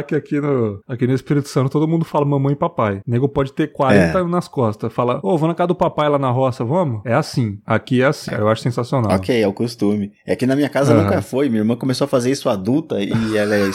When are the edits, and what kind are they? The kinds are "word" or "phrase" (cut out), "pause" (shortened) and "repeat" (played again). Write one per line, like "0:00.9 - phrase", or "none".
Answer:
0:08.3 - word

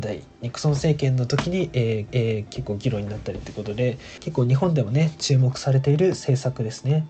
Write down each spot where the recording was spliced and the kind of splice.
0:02.1 - repeat

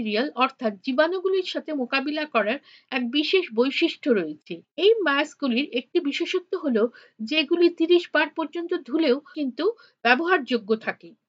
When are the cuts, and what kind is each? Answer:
none

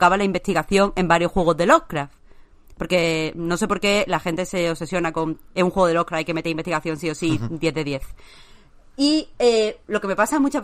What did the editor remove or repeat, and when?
none

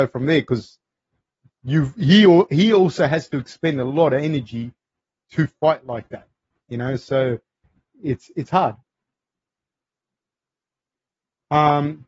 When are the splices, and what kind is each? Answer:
none

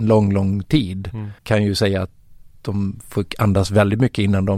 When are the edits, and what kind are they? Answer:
0:01.4 - pause

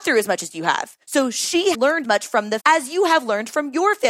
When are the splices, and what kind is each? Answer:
0:01.0 - pause
0:01.7 - word
0:02.0 - word
0:02.6 - word

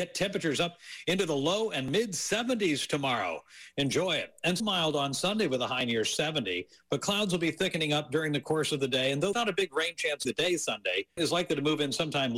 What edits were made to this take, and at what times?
0:04.6 - word
0:09.3 - word
0:10.3 - word
0:11.2 - word

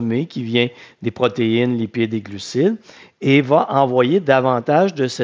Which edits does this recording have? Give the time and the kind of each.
none

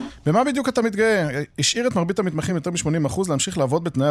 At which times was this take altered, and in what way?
none

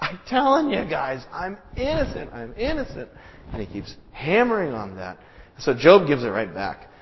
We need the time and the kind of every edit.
none

